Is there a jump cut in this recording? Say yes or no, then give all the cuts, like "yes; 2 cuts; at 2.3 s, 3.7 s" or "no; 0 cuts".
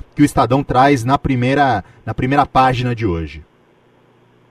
no; 0 cuts